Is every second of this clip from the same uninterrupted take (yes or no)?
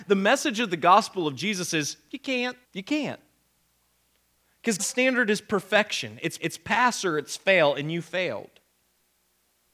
no